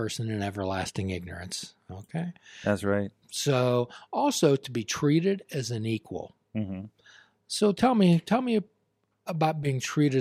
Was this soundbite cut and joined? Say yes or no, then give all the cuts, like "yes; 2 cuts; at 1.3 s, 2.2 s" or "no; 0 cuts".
no; 0 cuts